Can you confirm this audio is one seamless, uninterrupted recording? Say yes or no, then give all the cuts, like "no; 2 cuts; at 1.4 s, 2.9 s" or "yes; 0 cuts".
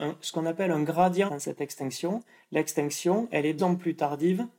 no; 2 cuts; at 1.3 s, 3.6 s